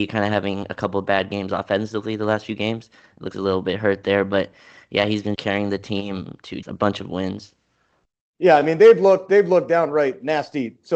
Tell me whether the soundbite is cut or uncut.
cut